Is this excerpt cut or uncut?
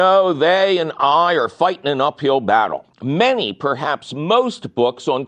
cut